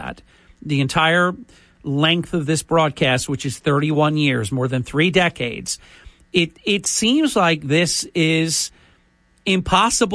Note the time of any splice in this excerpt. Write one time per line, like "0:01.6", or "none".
none

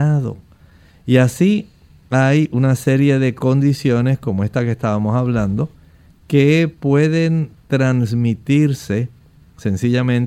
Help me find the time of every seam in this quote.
none

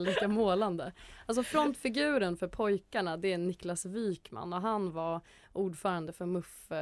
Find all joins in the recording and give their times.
none

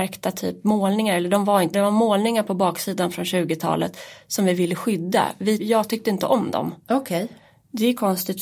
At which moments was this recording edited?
0:01.7
0:05.6

